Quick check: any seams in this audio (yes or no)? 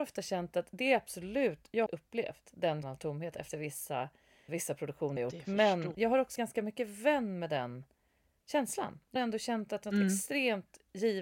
yes